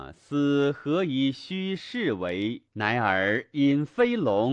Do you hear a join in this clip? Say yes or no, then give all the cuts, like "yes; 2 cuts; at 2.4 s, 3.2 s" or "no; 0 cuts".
yes; 1 cut; at 2.7 s